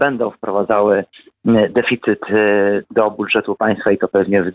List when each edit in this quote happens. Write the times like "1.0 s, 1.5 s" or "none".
none